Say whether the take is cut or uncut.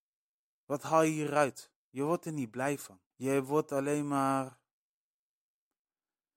cut